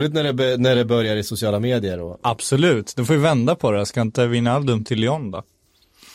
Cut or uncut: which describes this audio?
cut